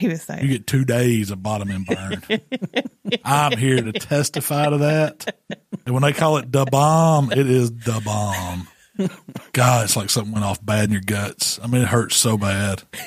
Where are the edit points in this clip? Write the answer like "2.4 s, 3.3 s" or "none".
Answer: none